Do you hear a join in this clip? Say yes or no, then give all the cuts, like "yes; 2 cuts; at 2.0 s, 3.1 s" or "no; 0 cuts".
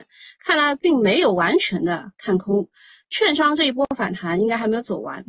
no; 0 cuts